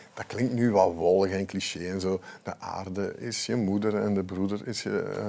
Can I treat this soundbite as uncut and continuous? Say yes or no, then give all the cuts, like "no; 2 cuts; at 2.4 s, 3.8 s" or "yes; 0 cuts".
yes; 0 cuts